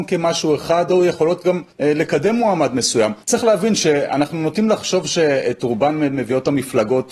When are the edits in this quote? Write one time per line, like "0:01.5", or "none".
0:01.7
0:03.2